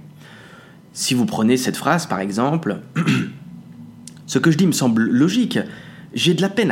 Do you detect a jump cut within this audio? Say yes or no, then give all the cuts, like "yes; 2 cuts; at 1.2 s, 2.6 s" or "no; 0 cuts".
no; 0 cuts